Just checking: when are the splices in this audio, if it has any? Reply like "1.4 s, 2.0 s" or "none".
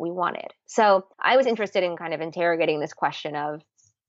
1.1 s